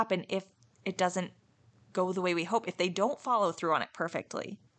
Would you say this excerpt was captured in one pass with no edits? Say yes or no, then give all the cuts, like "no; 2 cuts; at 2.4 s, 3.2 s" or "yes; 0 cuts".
yes; 0 cuts